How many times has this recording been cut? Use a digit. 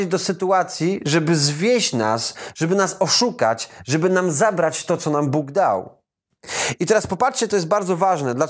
0